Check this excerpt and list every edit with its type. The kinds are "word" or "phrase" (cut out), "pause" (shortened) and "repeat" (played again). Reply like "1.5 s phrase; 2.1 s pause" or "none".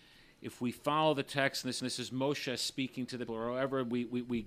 1.8 s repeat; 3.3 s word